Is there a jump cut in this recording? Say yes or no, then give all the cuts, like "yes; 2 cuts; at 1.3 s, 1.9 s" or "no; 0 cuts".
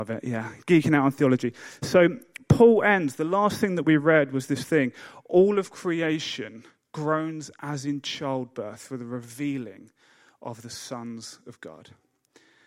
no; 0 cuts